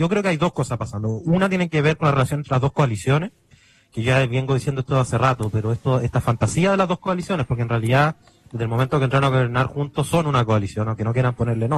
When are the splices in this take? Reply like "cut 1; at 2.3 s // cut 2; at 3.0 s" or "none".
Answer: cut 1; at 3.5 s